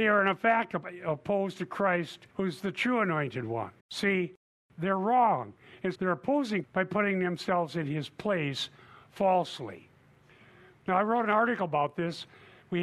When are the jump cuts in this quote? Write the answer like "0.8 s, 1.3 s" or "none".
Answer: 2.3 s, 3.8 s, 5.9 s, 6.6 s